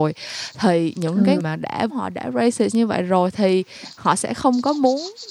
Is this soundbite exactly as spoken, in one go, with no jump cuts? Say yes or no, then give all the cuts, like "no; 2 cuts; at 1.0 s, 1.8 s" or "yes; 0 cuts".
no; 2 cuts; at 1.4 s, 1.9 s